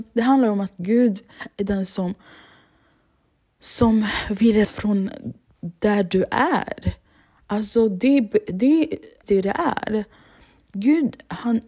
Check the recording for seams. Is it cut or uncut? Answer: cut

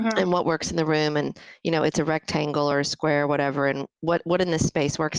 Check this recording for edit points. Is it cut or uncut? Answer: uncut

